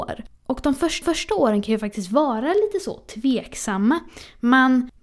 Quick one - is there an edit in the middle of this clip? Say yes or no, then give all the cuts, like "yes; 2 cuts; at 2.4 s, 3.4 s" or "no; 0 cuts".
yes; 1 cut; at 1.0 s